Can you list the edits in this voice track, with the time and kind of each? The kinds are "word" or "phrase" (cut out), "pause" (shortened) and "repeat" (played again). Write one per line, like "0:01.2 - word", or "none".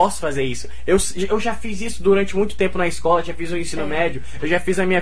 none